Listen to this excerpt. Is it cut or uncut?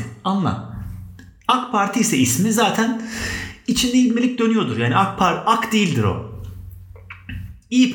uncut